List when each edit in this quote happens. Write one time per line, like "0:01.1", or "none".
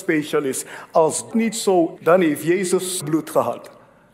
0:01.3
0:02.0
0:03.0